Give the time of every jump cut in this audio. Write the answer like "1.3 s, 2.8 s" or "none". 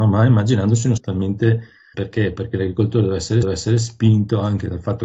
1.0 s, 1.9 s, 3.4 s

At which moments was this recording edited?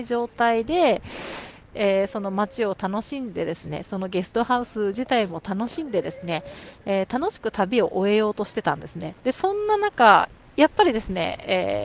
9.2 s

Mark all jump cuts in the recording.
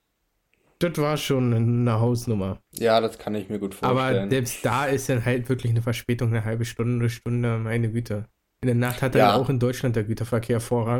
2.7 s

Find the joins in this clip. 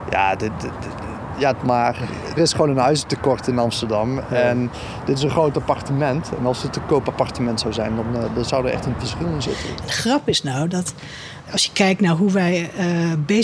1.5 s, 2.4 s, 9.0 s

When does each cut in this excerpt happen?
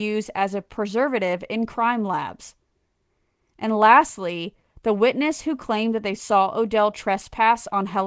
none

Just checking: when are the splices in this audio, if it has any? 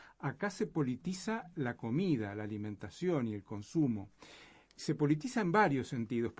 none

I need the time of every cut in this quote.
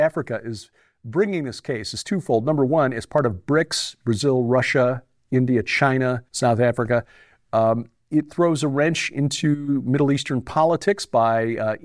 6.3 s

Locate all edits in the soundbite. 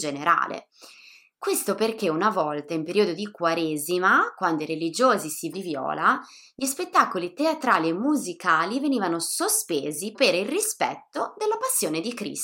5.5 s, 10.1 s

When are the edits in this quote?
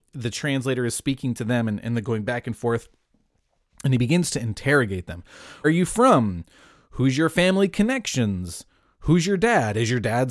5.6 s

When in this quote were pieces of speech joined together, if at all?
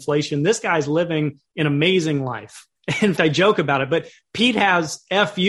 3.2 s

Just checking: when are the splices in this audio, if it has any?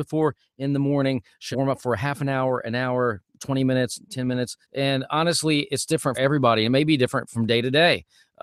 1.5 s, 4.6 s, 6.1 s

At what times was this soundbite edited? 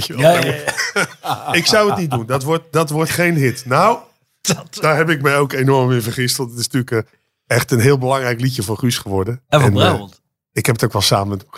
none

